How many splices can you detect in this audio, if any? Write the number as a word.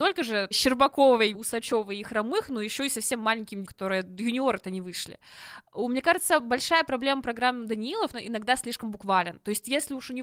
three